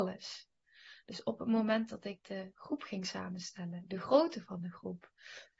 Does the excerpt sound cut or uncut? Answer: uncut